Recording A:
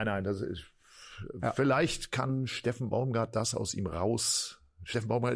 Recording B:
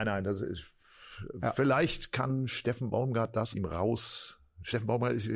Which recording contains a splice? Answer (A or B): B